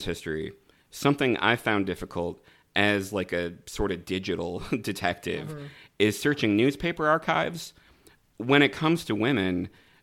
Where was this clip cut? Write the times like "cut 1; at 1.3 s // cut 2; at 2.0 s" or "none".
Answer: none